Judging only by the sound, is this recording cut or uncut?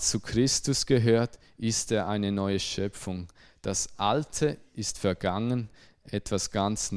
uncut